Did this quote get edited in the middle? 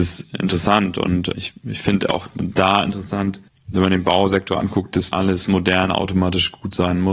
yes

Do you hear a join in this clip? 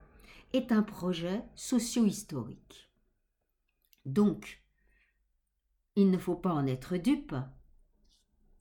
no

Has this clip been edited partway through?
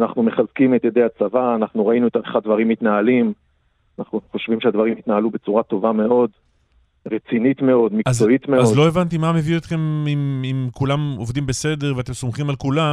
no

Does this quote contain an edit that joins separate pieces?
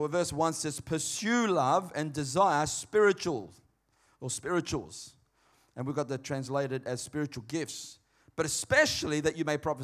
no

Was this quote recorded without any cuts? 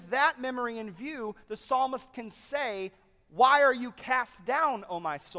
yes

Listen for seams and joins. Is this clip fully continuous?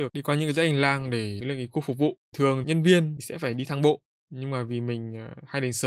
yes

